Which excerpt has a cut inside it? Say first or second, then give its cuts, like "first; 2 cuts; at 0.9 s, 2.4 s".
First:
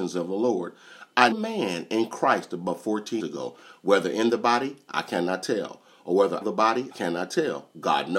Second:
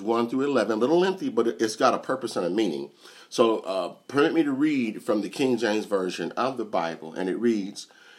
first; 4 cuts; at 1.3 s, 3.2 s, 6.4 s, 6.9 s